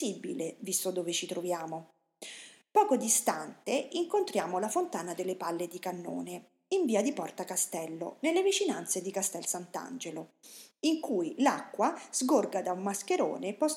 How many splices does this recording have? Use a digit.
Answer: 0